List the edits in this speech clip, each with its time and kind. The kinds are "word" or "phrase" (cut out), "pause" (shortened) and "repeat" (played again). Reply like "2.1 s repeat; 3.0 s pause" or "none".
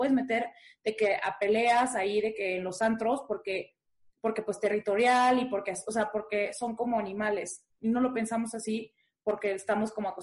none